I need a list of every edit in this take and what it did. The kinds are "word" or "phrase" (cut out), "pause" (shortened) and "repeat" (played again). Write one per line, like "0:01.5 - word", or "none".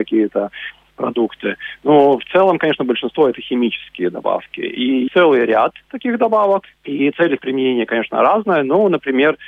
0:05.1 - word